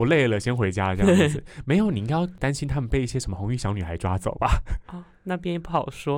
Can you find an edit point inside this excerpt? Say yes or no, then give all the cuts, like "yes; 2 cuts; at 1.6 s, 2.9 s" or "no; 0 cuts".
no; 0 cuts